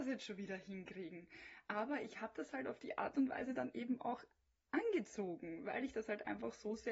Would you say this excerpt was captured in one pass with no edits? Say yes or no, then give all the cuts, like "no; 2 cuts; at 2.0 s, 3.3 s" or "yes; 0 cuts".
yes; 0 cuts